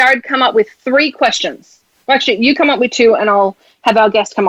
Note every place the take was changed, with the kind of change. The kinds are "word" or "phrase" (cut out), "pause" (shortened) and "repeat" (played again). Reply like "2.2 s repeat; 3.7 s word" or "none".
none